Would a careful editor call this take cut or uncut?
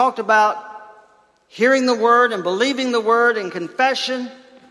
uncut